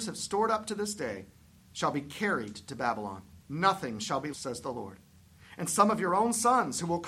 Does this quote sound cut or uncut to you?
cut